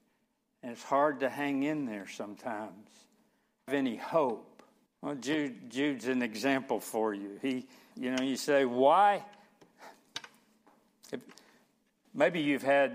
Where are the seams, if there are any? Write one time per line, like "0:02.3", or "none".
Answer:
0:03.7
0:04.9
0:07.9